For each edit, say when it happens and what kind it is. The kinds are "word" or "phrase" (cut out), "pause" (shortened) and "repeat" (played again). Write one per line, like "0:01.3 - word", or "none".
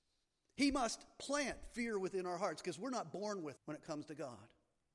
0:03.6 - word